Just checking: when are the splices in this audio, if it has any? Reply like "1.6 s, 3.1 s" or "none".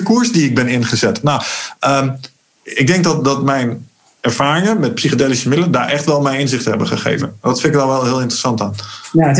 none